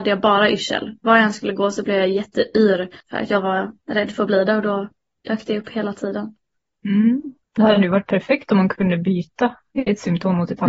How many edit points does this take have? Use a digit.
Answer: 2